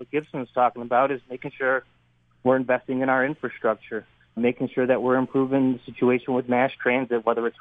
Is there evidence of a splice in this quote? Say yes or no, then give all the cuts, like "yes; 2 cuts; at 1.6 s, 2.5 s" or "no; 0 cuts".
yes; 1 cut; at 4.4 s